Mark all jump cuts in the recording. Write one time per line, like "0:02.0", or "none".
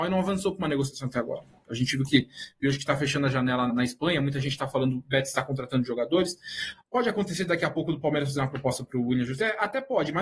0:03.7